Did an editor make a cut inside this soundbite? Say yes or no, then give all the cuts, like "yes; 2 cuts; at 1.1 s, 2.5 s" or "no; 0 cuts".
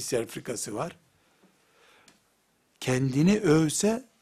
no; 0 cuts